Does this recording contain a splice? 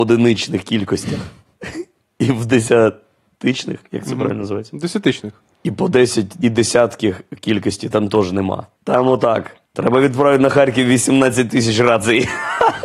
yes; 4 cuts; at 5.5 s, 6.4 s, 8.8 s, 9.6 s

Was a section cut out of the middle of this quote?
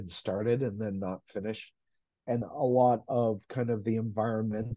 yes; 1 cut; at 2.4 s

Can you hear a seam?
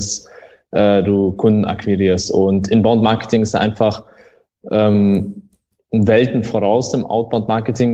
no; 0 cuts

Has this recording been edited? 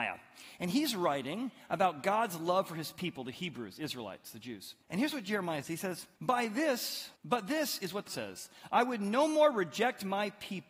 yes; 5 cuts; at 4.8 s, 5.6 s, 6.2 s, 7.2 s, 8.1 s

